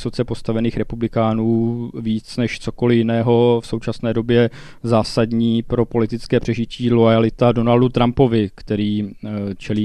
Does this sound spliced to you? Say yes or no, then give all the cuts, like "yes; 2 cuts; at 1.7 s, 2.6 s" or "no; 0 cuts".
no; 0 cuts